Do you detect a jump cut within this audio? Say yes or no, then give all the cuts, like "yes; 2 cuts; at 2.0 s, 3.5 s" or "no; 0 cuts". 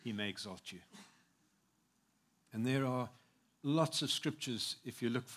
no; 0 cuts